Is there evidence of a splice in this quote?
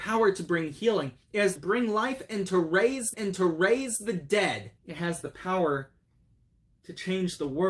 yes; 4 cuts; at 1.2 s, 1.6 s, 3.1 s, 4.8 s

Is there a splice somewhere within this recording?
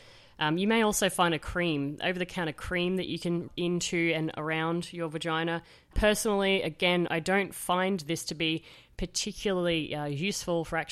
yes; 2 cuts; at 3.5 s, 7.1 s

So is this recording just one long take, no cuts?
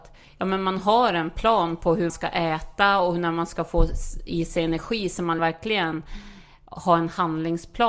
no; 2 cuts; at 2.1 s, 5.4 s

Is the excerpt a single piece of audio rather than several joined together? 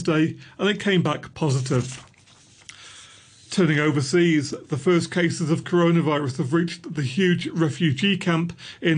yes; 0 cuts

